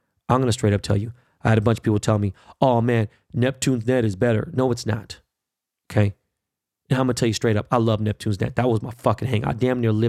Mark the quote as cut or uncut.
uncut